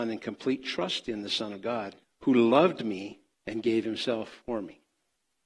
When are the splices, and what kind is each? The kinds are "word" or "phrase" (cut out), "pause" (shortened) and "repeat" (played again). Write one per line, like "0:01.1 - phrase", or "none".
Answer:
0:02.0 - pause
0:03.3 - pause